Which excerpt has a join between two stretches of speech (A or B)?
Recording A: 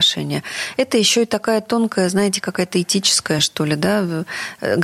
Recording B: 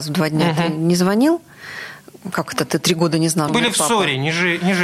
B